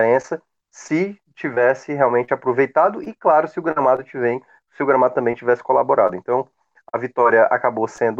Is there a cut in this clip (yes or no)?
no